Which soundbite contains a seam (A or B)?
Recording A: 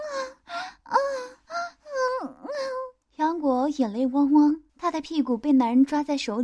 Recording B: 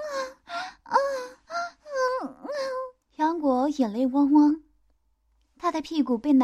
A